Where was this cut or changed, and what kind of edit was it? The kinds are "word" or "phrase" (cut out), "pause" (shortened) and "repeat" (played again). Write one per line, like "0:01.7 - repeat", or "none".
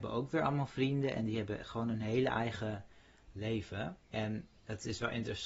0:04.0 - pause